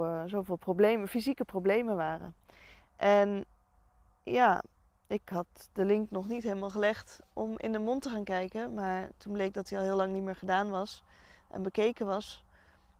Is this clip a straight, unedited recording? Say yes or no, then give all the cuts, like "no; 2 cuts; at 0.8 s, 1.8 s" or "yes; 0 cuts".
yes; 0 cuts